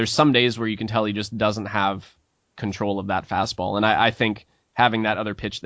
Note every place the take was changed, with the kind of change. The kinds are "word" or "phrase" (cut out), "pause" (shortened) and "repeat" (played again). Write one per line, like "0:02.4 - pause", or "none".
none